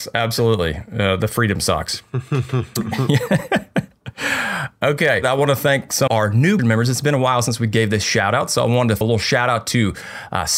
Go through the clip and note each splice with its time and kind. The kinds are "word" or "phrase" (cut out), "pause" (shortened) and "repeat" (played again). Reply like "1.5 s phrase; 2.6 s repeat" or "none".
6.1 s word; 6.6 s word; 9.0 s word